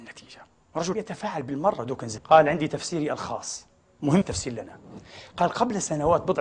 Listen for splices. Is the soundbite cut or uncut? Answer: cut